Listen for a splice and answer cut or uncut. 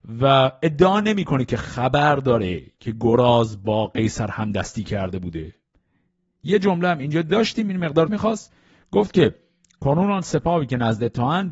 cut